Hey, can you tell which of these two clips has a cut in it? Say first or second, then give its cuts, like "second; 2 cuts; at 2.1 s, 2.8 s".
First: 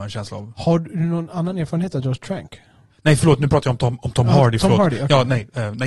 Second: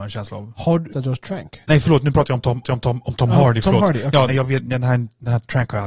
second; 4 cuts; at 0.9 s, 1.6 s, 2.6 s, 4.3 s